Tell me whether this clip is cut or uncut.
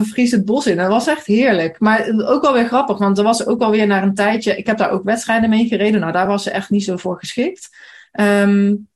uncut